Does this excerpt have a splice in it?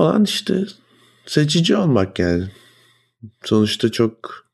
no; 0 cuts

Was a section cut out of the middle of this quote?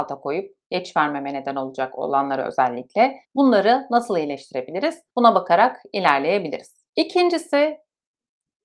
yes; 3 cuts; at 3.2 s, 5.1 s, 6.9 s

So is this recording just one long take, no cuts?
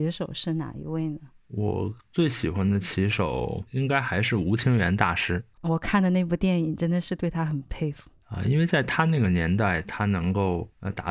no; 1 cut; at 3.7 s

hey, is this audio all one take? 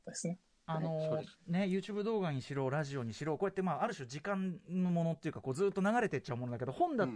yes; 0 cuts

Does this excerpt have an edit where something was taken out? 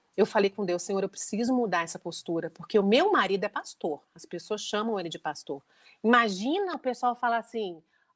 no; 0 cuts

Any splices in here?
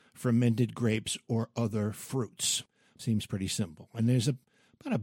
no; 0 cuts

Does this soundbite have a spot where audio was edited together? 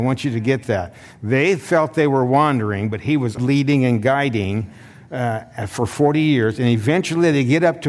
yes; 1 cut; at 3.4 s

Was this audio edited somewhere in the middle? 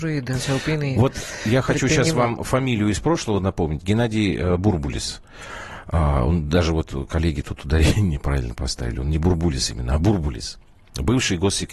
no; 0 cuts

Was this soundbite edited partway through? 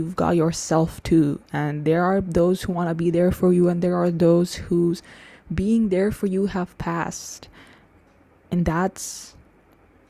no; 0 cuts

